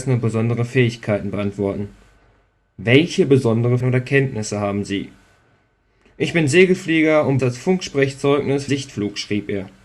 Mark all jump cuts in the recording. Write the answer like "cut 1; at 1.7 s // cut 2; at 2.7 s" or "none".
cut 1; at 3.8 s // cut 2; at 7.4 s // cut 3; at 8.7 s